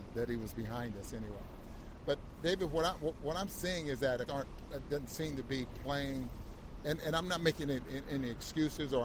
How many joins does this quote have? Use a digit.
1